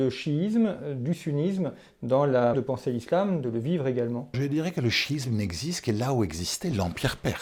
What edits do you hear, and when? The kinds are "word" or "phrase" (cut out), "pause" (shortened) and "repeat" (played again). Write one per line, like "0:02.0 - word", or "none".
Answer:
0:02.5 - word
0:04.3 - word